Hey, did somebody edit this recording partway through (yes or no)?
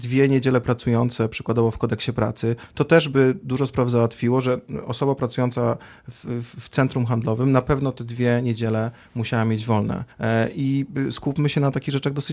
yes